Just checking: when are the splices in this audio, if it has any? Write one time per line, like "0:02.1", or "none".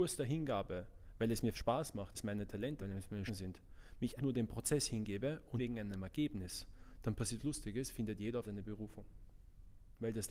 0:01.5
0:02.1
0:02.8
0:03.3
0:04.2
0:05.6
0:07.4
0:08.4